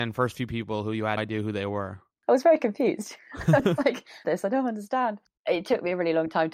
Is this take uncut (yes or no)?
no